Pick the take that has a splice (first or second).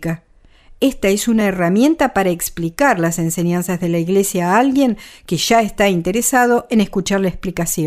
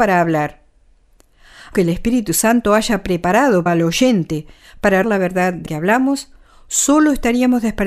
second